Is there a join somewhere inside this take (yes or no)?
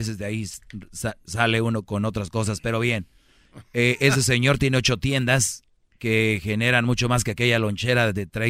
no